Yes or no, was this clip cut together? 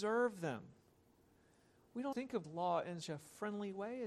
yes